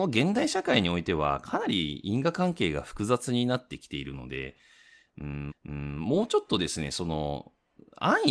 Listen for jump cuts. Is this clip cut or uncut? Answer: cut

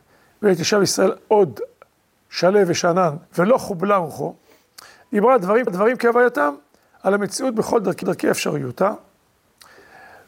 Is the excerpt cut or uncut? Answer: cut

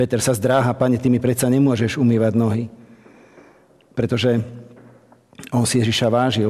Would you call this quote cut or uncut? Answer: uncut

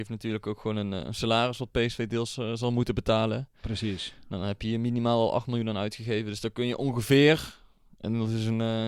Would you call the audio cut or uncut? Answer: uncut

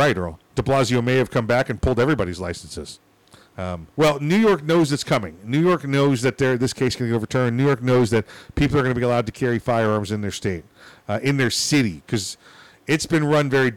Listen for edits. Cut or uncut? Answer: cut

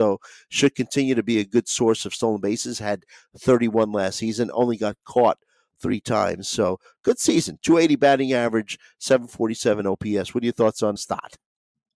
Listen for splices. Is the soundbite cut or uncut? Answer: cut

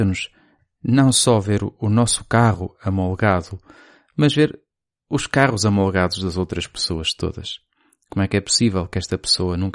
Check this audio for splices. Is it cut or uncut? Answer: uncut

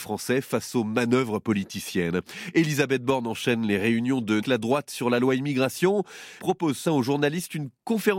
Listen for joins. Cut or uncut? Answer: cut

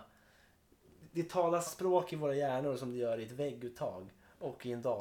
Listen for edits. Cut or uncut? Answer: cut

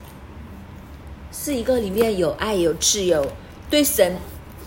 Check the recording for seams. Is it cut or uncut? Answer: uncut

